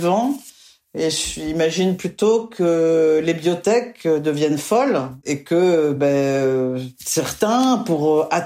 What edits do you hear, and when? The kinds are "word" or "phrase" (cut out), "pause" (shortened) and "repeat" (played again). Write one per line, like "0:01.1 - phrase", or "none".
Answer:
none